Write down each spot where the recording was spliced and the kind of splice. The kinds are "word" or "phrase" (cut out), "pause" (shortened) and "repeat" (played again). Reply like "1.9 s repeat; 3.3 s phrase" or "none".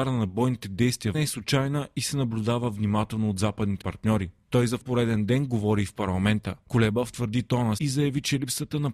1.1 s phrase; 3.8 s word; 4.8 s word; 7.8 s word